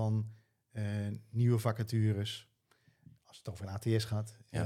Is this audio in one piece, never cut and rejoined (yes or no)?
yes